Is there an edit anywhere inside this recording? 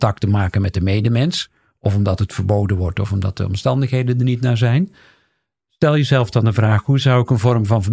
no; 0 cuts

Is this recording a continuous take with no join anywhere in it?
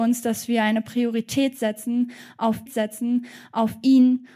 no; 1 cut; at 2.7 s

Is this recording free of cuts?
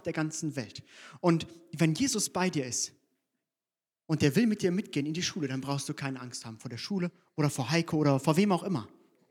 yes; 0 cuts

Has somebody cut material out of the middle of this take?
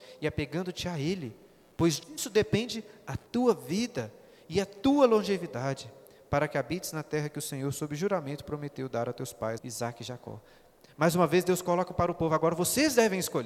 yes; 1 cut; at 9.6 s

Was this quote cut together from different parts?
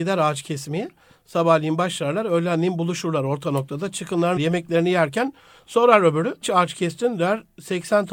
yes; 2 cuts; at 4.4 s, 6.4 s

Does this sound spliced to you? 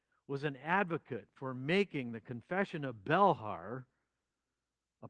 no; 0 cuts

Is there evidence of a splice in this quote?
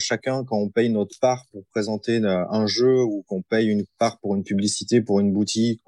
no; 0 cuts

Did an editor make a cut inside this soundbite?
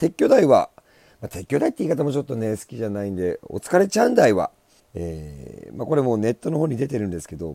yes; 1 cut; at 4.8 s

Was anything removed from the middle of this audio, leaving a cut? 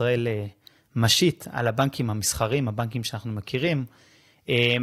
no; 0 cuts

